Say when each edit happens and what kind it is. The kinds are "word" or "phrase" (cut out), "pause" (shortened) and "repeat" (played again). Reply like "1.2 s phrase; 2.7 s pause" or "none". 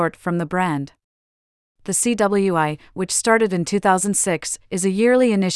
none